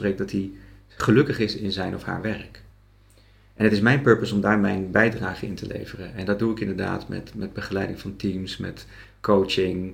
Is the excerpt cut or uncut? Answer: uncut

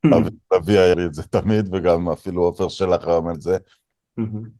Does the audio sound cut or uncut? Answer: cut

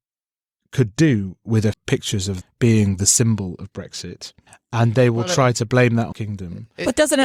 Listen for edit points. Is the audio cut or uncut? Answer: cut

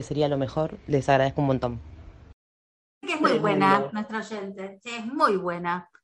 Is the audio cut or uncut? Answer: cut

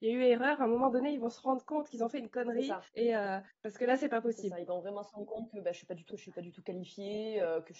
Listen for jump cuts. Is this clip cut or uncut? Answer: cut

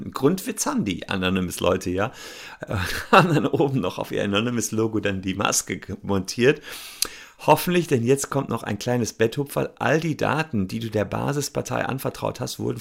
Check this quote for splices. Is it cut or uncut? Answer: uncut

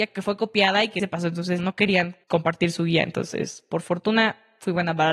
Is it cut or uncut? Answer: cut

